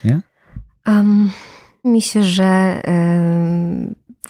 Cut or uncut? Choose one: cut